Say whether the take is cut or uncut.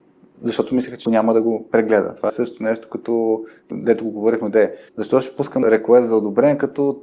cut